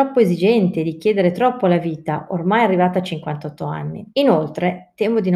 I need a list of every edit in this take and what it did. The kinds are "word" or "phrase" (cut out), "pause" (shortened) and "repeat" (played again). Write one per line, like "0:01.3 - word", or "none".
0:04.1 - pause